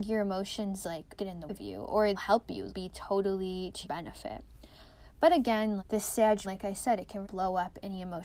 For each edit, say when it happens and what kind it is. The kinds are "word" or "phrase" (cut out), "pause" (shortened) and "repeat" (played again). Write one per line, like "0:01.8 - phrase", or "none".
0:01.2 - word
0:01.5 - word
0:02.1 - word
0:02.7 - word
0:03.8 - word
0:05.8 - word
0:06.4 - word
0:07.2 - word

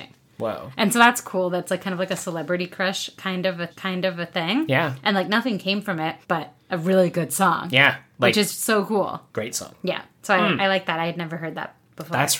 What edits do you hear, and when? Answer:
0:03.7 - repeat
0:06.2 - pause
0:09.3 - pause

